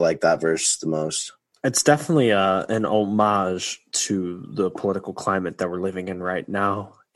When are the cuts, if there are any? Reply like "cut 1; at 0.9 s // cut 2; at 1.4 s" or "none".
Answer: none